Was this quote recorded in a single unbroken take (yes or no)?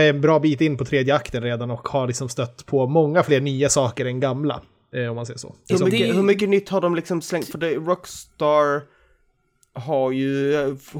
no